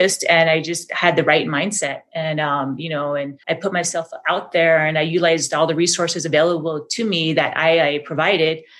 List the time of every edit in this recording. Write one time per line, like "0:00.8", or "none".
0:03.4